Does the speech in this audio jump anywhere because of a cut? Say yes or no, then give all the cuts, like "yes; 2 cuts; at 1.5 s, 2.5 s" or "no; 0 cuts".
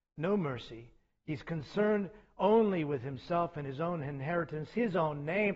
no; 0 cuts